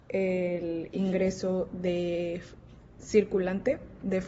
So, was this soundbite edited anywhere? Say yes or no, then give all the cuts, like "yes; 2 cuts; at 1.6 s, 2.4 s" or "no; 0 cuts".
no; 0 cuts